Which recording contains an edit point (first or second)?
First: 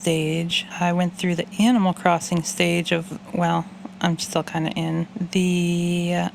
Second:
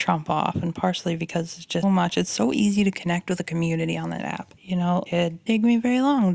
second